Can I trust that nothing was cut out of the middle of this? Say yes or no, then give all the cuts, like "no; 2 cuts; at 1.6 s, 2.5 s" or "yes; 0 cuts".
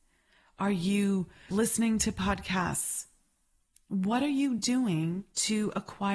yes; 0 cuts